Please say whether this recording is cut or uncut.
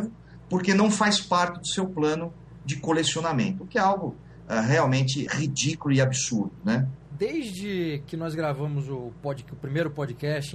cut